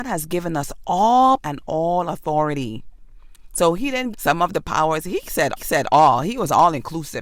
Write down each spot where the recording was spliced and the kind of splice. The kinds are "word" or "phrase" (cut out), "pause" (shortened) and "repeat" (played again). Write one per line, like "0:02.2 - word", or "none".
0:01.4 - word
0:04.1 - phrase
0:05.6 - repeat